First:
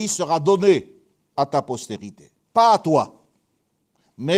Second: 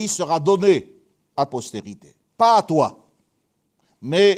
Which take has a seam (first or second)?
second